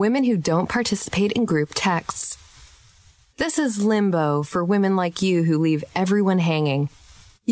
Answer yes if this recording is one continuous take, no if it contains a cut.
yes